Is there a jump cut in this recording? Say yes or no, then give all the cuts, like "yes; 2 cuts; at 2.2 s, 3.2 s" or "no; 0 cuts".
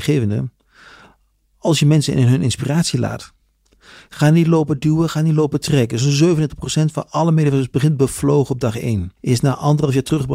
yes; 1 cut; at 9.2 s